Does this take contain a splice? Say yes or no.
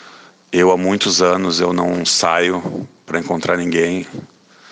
no